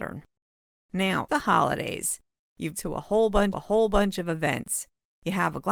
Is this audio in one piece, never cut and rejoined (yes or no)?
no